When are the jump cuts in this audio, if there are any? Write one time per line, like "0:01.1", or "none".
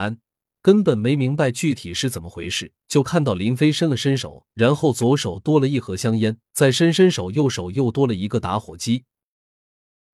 0:02.8
0:04.5
0:06.5

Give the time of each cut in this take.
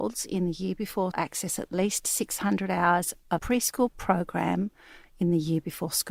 0:01.1
0:03.4

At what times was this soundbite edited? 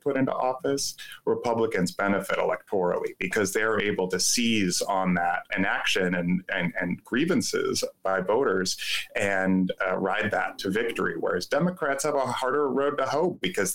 0:05.5

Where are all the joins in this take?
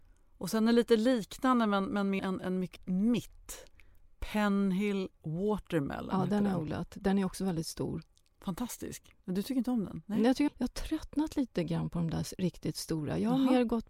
0:02.2
0:02.8
0:09.2
0:10.5

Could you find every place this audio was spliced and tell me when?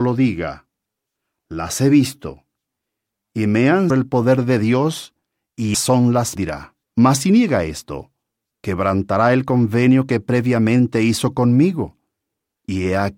0:03.9
0:05.7
0:06.4
0:06.8

